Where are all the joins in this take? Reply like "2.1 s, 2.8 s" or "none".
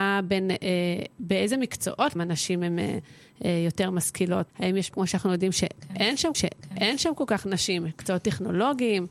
2.2 s, 4.5 s, 4.9 s, 6.3 s